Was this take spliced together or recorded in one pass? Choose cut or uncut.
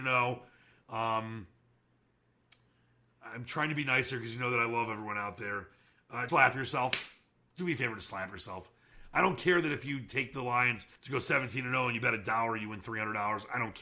cut